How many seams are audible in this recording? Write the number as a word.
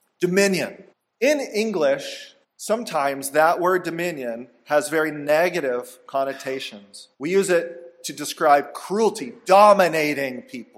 three